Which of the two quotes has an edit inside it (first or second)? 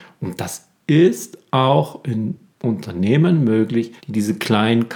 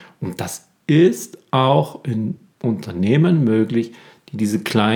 first